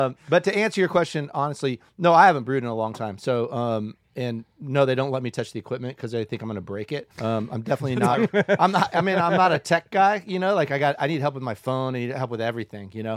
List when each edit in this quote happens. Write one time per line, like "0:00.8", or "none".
0:01.9
0:07.1